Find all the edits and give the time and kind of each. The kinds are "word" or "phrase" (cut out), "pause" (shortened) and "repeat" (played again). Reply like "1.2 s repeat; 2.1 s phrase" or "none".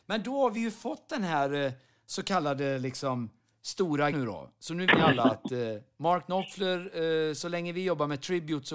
4.1 s word; 4.9 s word